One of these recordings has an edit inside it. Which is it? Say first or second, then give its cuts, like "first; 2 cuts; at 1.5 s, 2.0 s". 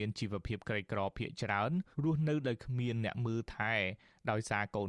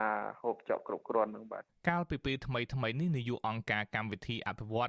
first; 1 cut; at 1.9 s